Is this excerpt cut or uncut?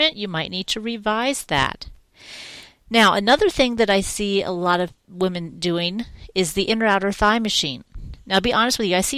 uncut